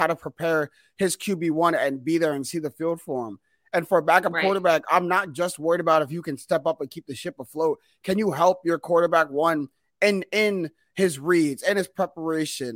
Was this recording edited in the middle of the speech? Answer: no; 0 cuts

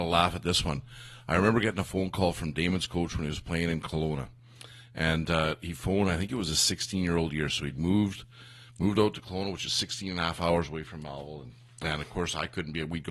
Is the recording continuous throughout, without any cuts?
yes; 0 cuts

